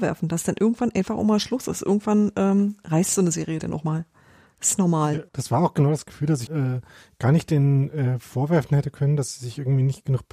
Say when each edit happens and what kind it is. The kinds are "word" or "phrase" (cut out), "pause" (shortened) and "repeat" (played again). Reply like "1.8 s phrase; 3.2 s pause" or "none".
5.3 s pause; 6.5 s phrase